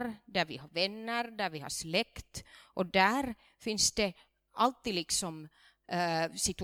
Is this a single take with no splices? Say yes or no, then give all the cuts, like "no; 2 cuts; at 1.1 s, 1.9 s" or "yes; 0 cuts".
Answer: yes; 0 cuts